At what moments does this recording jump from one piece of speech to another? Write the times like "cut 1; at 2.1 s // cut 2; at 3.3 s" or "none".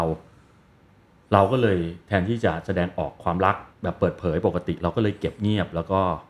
cut 1; at 3.7 s